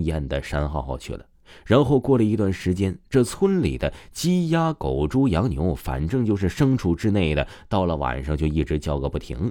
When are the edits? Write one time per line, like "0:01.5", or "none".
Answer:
none

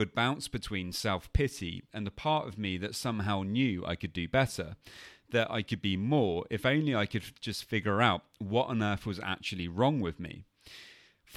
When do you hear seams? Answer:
none

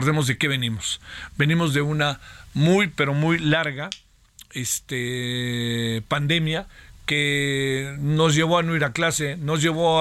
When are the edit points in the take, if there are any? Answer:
none

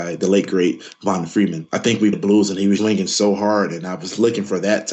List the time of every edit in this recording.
0:02.1
0:02.8

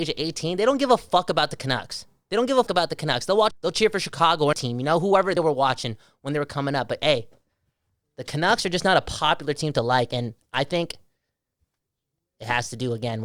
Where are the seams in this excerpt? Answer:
0:02.7
0:03.5
0:04.5
0:05.4

